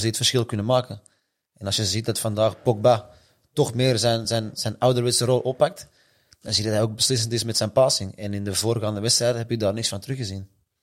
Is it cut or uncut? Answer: uncut